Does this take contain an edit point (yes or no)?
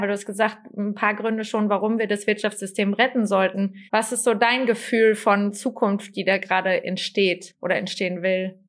yes